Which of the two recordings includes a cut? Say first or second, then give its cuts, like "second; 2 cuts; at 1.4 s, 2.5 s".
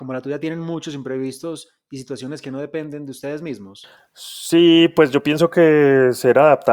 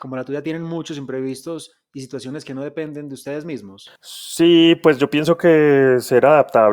second; 1 cut; at 4.0 s